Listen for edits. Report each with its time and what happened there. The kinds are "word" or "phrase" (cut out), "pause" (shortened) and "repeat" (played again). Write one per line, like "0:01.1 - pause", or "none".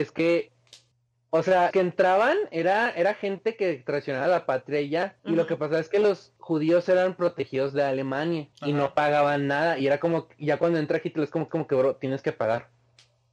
0:00.9 - pause
0:01.7 - word
0:05.2 - pause
0:06.4 - pause
0:08.5 - pause
0:11.5 - repeat